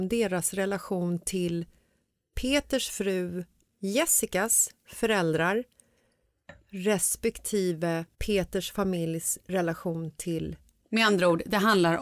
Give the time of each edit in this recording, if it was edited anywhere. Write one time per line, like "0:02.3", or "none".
0:08.1